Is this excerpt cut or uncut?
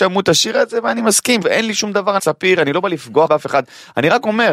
cut